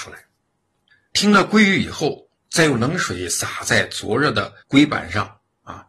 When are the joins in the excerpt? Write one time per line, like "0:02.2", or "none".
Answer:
0:02.4
0:04.6